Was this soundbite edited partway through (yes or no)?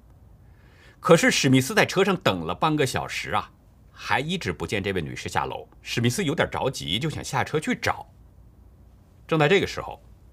yes